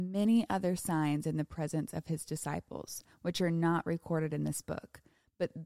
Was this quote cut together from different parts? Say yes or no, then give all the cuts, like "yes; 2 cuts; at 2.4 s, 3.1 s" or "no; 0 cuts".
no; 0 cuts